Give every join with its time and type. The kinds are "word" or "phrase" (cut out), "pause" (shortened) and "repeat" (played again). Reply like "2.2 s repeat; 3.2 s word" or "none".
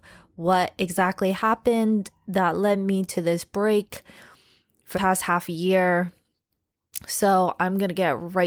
4.9 s word